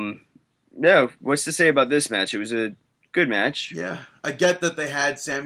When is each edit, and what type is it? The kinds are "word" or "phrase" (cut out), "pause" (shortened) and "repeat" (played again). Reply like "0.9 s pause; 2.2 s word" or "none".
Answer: none